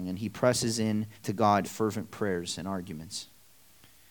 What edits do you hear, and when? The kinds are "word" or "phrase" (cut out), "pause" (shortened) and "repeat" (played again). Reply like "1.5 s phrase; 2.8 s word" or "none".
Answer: 1.2 s pause; 1.6 s phrase

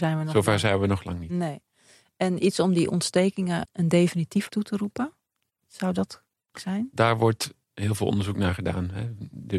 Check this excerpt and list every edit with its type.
3.6 s word; 4.5 s word; 6.5 s word

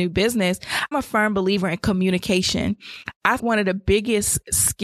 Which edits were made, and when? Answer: 0.9 s word; 3.4 s word

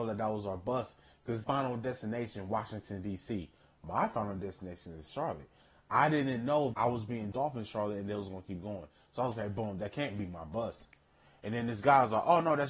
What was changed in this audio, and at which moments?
1.4 s word; 6.7 s word; 7.3 s word; 9.3 s word

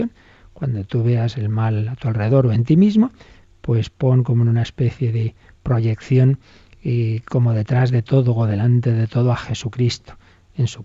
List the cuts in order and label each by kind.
none

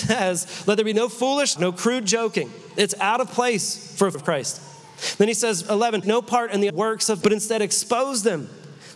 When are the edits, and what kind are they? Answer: 1.6 s word; 4.1 s word; 5.6 s word; 6.0 s word; 6.7 s word; 7.2 s word

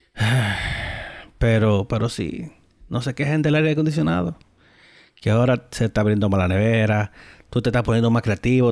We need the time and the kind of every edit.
none

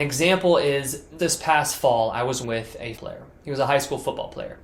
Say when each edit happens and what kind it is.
1.2 s word; 2.4 s word; 3.0 s word

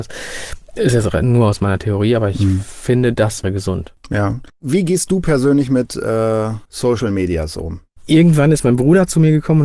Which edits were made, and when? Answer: 3.4 s word; 4.5 s pause; 6.6 s pause

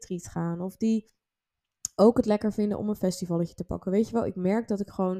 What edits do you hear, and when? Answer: none

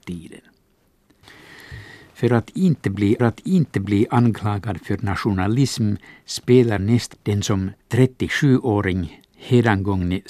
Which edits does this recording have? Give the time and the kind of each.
3.2 s repeat; 6.8 s phrase; 7.1 s word; 7.8 s pause

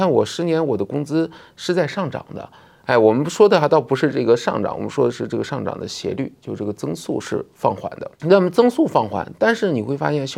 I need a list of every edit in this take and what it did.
8.1 s pause

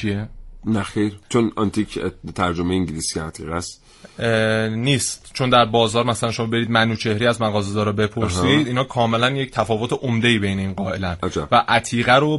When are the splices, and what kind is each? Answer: 1.2 s pause

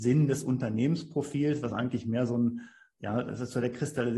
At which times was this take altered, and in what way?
none

